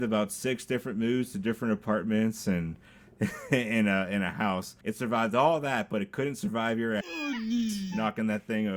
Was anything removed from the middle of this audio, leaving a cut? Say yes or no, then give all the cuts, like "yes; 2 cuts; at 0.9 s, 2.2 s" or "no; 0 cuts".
yes; 1 cut; at 4.8 s